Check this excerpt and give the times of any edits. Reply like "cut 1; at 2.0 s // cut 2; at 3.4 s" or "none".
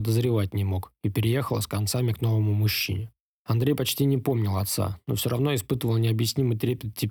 none